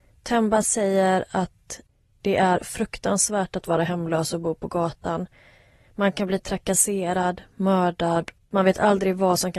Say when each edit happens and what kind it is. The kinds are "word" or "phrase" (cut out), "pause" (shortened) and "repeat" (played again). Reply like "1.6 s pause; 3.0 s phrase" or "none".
none